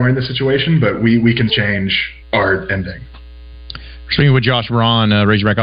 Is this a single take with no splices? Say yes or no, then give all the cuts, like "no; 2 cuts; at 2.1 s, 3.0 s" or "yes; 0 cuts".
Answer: no; 2 cuts; at 1.5 s, 2.2 s